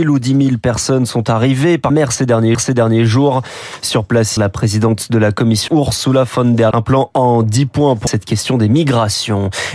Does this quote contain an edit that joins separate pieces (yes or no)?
yes